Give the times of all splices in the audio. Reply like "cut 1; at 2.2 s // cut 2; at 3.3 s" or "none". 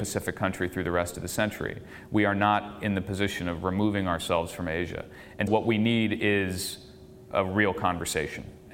cut 1; at 5.5 s